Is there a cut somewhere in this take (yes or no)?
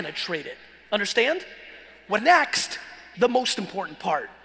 yes